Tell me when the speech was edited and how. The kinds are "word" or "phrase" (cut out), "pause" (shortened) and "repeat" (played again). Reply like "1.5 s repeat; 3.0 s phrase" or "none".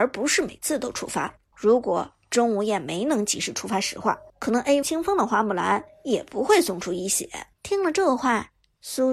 1.5 s pause; 4.3 s pause; 4.8 s word; 7.5 s pause